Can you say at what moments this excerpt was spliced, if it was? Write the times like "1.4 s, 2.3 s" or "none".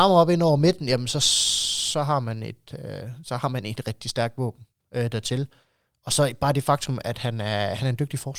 3.8 s